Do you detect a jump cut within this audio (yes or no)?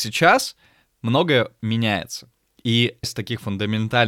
yes